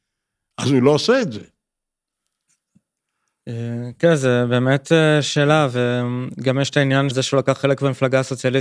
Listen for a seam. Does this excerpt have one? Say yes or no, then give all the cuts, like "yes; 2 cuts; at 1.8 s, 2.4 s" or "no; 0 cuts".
yes; 1 cut; at 7.1 s